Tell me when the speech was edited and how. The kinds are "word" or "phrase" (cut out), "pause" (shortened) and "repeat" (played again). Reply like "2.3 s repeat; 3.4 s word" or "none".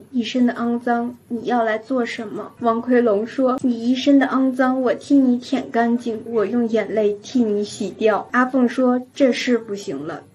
6.3 s phrase